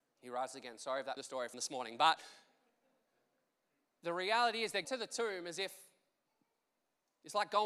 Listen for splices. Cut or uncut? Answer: cut